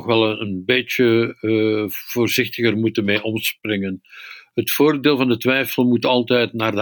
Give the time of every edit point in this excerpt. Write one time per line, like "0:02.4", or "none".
none